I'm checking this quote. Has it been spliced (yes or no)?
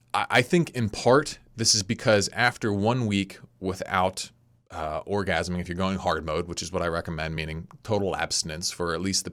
no